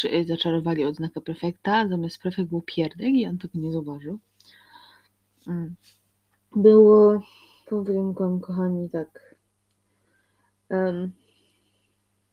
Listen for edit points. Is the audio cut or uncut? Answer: uncut